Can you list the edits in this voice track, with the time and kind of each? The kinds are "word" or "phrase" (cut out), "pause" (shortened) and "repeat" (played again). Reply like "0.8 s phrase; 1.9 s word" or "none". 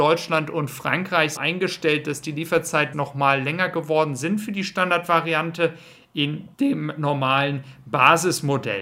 1.4 s word; 2.9 s word; 6.5 s pause